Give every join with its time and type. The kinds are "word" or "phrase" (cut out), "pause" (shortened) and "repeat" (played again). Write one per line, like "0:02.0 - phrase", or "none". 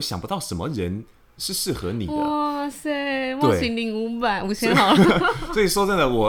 none